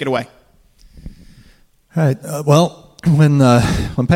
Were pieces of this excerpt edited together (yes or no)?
no